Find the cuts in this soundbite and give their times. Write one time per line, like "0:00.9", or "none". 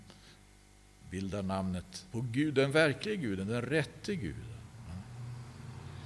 0:02.1

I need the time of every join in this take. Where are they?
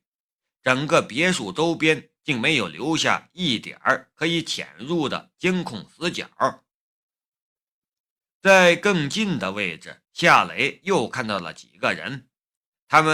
0:10.0

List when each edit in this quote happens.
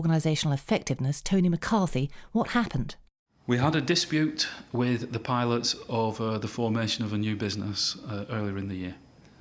none

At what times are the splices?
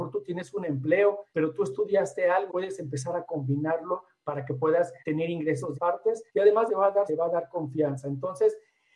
0:01.3
0:02.5
0:05.0
0:05.7
0:06.3
0:06.7
0:07.1

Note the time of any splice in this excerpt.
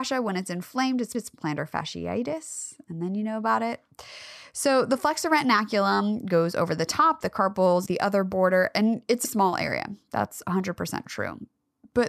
0:01.1
0:07.9
0:09.2

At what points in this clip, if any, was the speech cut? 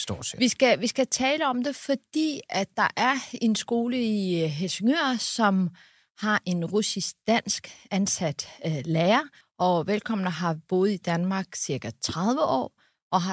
0:09.4

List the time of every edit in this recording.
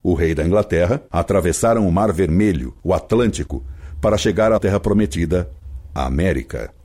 0:04.6

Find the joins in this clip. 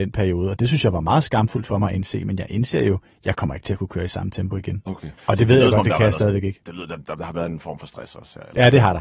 0:05.2

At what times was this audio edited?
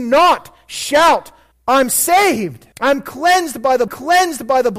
0:01.5
0:02.7
0:03.9

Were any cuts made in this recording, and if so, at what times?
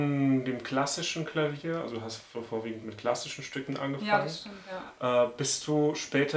none

